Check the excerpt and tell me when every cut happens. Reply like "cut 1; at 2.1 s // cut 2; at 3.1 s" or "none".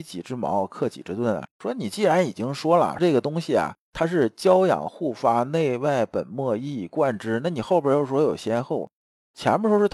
cut 1; at 1.5 s